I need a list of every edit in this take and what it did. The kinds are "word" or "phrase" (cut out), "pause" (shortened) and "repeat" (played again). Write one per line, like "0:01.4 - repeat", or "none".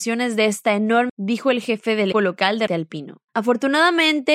0:01.1 - word
0:02.1 - word
0:02.7 - word